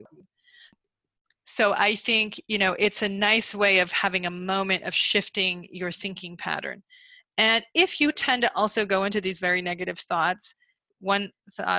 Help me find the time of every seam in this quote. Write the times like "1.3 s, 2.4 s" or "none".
none